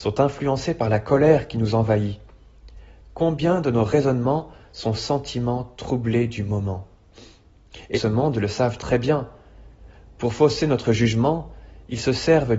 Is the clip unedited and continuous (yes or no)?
no